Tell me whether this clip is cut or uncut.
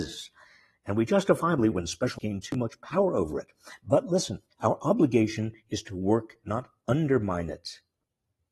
cut